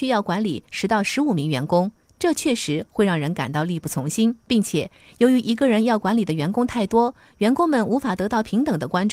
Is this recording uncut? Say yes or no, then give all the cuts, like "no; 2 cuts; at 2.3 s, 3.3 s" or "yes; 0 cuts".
no; 1 cut; at 4.4 s